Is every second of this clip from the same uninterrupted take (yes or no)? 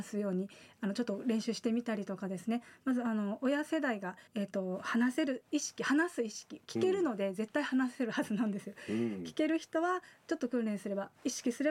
no